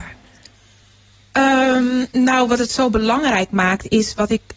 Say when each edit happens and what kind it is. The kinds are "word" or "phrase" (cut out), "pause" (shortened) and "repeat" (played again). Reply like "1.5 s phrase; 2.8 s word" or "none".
2.1 s pause